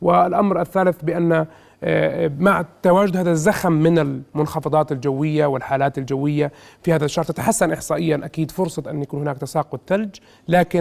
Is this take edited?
no; 0 cuts

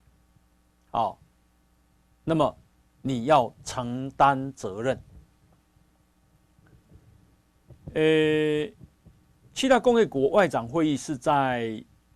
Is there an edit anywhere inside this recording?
no; 0 cuts

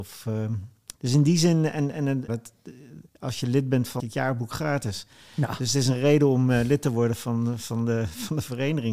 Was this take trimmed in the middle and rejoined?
yes; 4 cuts; at 0.9 s, 2.3 s, 3.1 s, 4.0 s

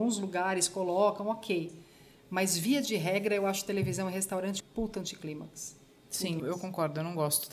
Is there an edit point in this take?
yes; 2 cuts; at 4.6 s, 6.4 s

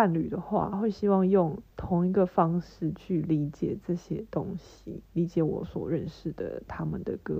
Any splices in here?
yes; 2 cuts; at 1.7 s, 5.0 s

